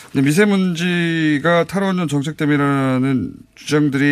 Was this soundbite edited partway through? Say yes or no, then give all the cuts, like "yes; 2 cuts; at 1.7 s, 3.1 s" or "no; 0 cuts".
no; 0 cuts